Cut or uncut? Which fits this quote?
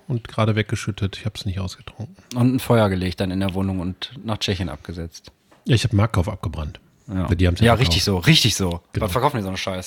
uncut